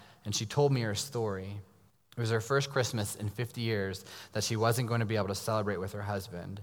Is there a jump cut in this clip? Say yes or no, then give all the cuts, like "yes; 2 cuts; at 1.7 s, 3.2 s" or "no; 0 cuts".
yes; 1 cut; at 1.9 s